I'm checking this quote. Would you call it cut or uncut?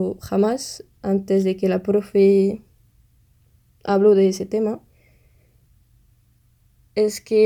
uncut